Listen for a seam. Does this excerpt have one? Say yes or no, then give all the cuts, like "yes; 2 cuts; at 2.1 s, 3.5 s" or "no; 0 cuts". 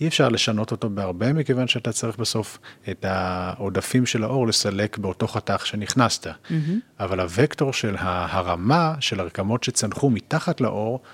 no; 0 cuts